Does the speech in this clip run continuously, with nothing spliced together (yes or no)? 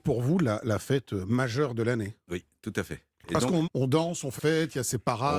no